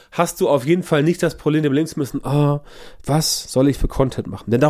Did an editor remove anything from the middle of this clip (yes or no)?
no